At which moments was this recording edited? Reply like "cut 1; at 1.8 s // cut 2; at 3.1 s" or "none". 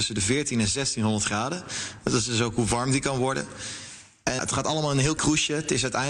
cut 1; at 4.4 s // cut 2; at 5.2 s